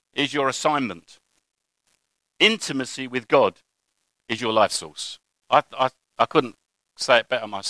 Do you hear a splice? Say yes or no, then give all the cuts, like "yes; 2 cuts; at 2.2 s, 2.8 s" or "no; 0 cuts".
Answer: no; 0 cuts